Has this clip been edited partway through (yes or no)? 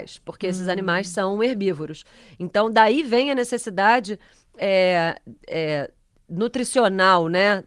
no